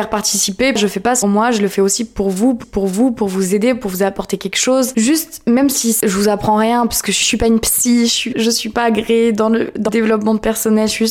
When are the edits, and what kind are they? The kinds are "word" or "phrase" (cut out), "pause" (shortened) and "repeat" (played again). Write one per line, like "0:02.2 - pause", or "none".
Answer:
0:01.2 - phrase
0:02.6 - repeat
0:08.3 - word
0:09.9 - word

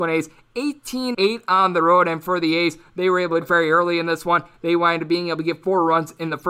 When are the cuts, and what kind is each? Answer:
0:01.1 - word
0:03.4 - word

